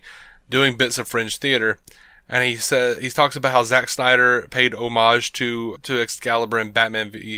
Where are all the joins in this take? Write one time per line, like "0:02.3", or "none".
0:05.8